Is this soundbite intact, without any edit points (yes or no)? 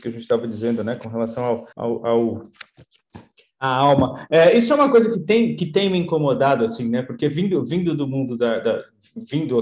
no